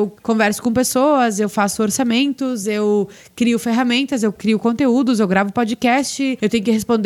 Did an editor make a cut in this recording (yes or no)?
no